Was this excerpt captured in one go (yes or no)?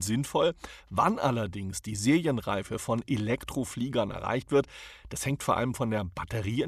yes